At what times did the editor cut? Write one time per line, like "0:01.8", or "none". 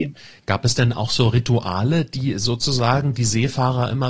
none